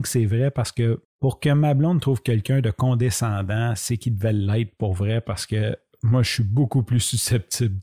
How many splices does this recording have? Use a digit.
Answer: 0